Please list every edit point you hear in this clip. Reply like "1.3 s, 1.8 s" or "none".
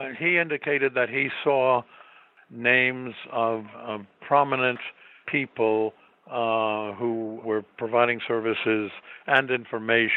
3.7 s, 5.2 s, 7.4 s